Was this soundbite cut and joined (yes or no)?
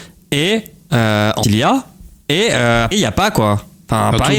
yes